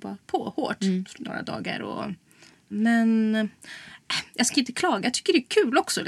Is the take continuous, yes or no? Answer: yes